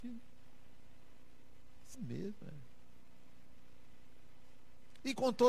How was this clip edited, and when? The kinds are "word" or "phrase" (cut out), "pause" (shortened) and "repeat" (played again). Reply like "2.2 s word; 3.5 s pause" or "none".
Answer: 1.9 s word

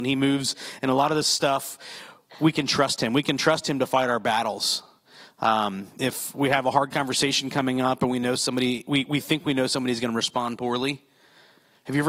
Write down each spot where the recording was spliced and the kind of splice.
none

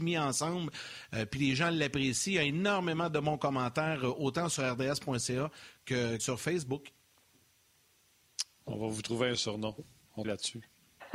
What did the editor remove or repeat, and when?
6.2 s word; 10.2 s word

